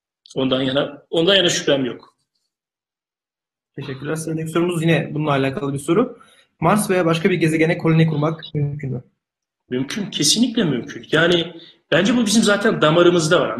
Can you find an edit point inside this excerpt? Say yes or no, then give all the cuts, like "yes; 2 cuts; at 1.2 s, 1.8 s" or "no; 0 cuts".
no; 0 cuts